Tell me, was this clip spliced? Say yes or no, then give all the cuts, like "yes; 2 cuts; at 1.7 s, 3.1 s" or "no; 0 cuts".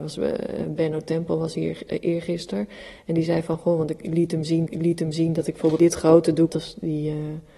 yes; 3 cuts; at 4.7 s, 5.8 s, 6.5 s